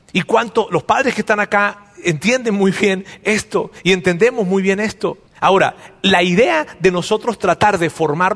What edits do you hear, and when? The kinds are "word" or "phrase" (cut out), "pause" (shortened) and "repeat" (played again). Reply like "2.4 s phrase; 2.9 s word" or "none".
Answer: 5.3 s pause